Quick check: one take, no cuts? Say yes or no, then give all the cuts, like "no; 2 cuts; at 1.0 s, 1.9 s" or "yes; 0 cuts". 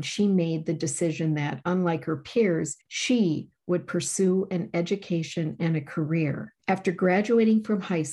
no; 2 cuts; at 2.8 s, 6.6 s